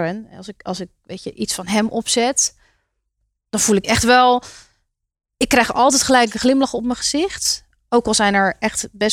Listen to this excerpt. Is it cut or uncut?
uncut